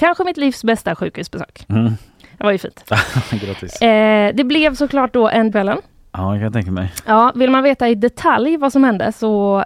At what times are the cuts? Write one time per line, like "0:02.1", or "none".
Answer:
0:05.5